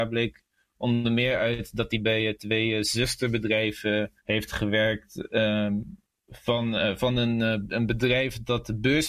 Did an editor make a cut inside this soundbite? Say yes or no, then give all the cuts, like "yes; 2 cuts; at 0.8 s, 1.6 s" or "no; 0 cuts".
yes; 1 cut; at 4.2 s